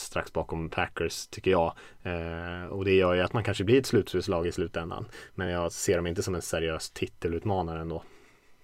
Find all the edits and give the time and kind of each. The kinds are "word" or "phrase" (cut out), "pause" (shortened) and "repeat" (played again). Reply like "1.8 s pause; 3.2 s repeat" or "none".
none